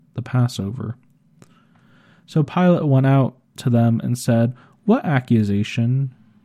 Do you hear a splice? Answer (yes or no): no